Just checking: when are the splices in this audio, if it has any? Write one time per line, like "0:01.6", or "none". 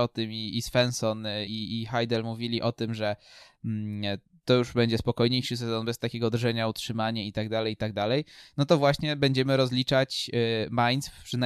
0:01.5